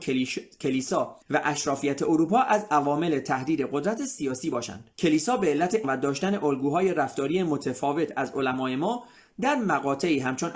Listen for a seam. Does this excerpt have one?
yes; 3 cuts; at 1.2 s, 4.9 s, 5.8 s

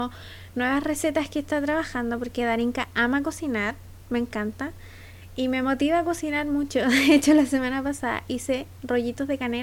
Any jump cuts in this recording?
no; 0 cuts

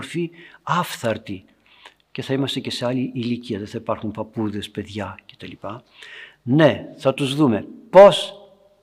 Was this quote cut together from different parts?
no; 0 cuts

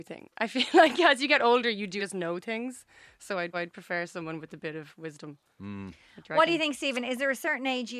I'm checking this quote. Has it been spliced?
yes; 2 cuts; at 2.0 s, 3.5 s

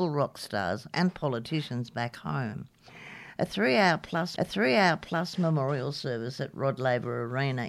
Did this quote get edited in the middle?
yes; 1 cut; at 4.4 s

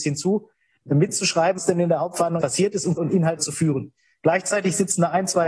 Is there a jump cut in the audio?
yes; 4 cuts; at 1.6 s, 2.4 s, 3.0 s, 3.4 s

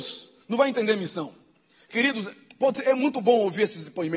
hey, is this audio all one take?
yes; 0 cuts

